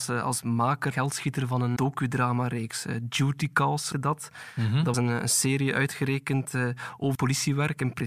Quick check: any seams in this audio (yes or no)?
yes